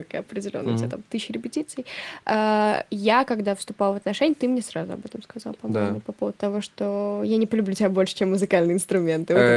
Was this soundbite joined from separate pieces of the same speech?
no; 0 cuts

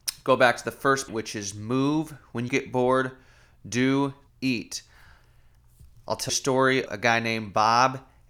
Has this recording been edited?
yes; 5 cuts; at 1.1 s, 2.5 s, 4.3 s, 6.3 s, 6.9 s

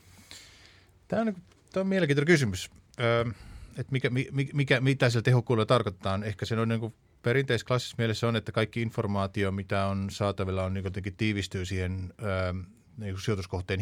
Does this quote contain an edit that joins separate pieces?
no; 0 cuts

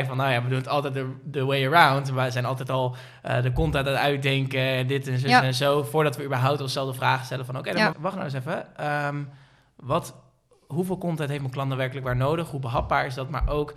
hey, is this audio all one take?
no; 1 cut; at 7.9 s

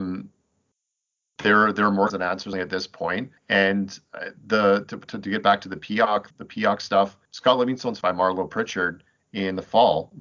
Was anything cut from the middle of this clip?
yes; 6 cuts; at 2.1 s, 2.5 s, 3.4 s, 6.3 s, 7.2 s, 8.0 s

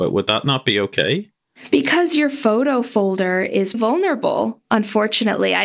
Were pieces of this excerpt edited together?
yes; 1 cut; at 3.7 s

